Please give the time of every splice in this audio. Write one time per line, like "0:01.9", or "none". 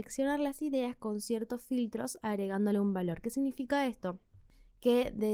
none